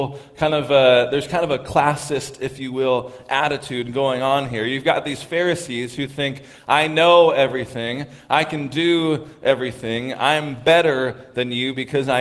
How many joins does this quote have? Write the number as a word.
zero